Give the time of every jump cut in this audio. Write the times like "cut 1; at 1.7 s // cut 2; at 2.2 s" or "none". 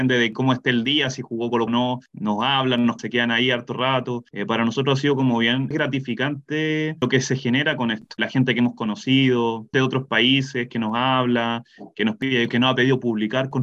cut 1; at 1.7 s // cut 2; at 3.0 s // cut 3; at 9.7 s // cut 4; at 12.5 s